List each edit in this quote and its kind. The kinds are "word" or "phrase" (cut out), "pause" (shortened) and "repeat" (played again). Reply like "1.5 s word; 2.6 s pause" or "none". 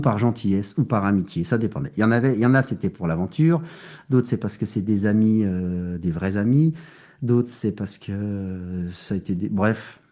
none